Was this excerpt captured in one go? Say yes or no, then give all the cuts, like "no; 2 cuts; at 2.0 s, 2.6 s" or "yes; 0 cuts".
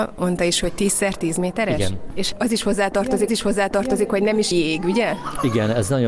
no; 2 cuts; at 3.3 s, 4.5 s